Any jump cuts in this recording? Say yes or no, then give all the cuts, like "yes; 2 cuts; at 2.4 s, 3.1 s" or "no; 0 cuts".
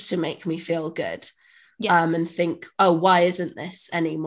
no; 0 cuts